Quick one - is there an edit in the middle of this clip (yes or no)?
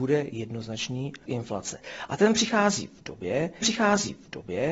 yes